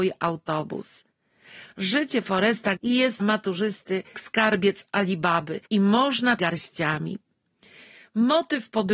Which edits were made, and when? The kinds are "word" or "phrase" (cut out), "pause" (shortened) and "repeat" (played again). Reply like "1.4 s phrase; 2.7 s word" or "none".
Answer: 2.8 s word; 3.2 s word; 4.1 s word; 5.6 s pause; 6.4 s phrase